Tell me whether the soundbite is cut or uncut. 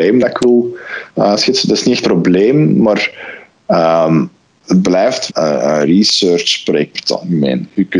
cut